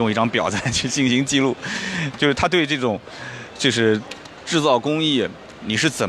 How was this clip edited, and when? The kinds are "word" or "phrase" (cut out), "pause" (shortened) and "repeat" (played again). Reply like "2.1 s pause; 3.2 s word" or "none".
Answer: 2.1 s word